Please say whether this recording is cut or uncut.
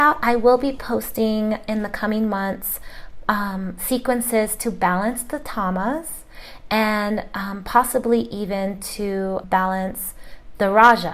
cut